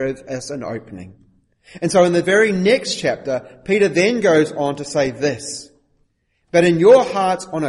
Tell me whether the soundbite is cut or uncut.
uncut